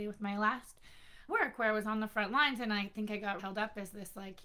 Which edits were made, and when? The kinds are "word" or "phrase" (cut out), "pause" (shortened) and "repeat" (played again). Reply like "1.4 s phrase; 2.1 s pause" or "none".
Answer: 1.3 s word; 3.4 s word